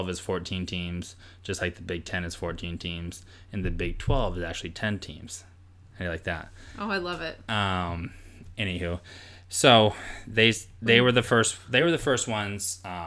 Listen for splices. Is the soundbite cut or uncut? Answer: uncut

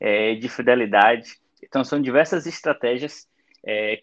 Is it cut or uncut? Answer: uncut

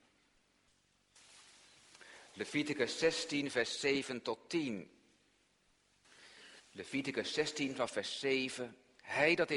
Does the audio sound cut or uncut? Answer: cut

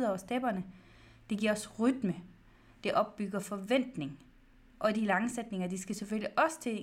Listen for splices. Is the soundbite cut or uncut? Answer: uncut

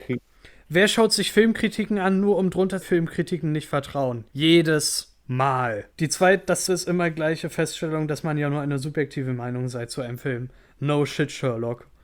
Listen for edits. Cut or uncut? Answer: cut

